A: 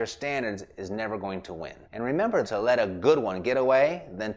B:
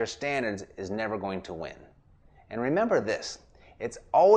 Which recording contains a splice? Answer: A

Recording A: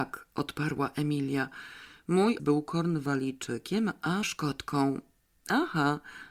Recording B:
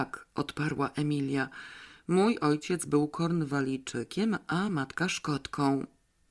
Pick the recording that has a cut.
A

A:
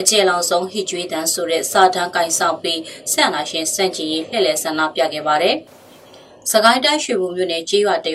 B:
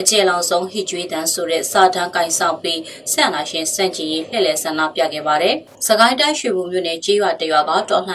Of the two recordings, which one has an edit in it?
B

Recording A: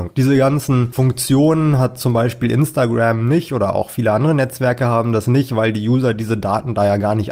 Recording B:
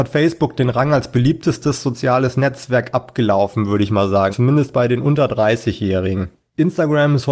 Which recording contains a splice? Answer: B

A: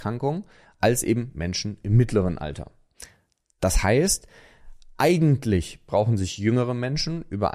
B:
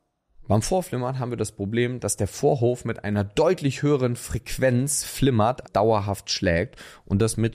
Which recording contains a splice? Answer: B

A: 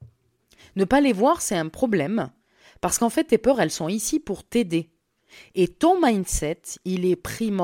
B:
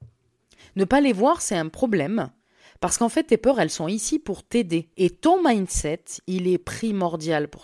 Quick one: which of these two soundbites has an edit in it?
B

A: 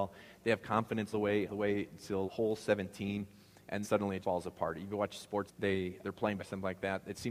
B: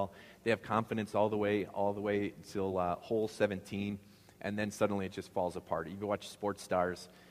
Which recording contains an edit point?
A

